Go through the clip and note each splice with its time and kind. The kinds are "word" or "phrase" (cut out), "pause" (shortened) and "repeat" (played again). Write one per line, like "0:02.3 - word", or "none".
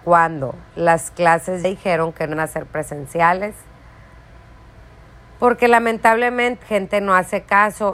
0:01.6 - word
0:02.3 - word
0:06.6 - word